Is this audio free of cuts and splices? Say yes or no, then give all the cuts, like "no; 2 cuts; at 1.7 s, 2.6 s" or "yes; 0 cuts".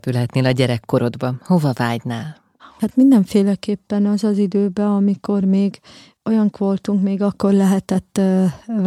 no; 2 cuts; at 2.6 s, 6.5 s